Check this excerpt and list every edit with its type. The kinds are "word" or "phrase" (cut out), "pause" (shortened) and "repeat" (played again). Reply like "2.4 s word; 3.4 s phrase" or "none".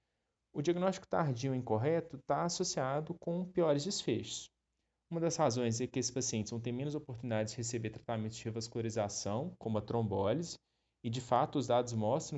none